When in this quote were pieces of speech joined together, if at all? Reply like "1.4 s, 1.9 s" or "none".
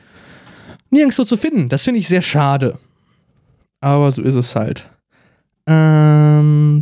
none